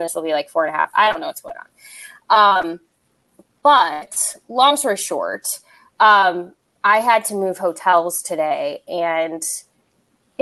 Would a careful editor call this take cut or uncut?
uncut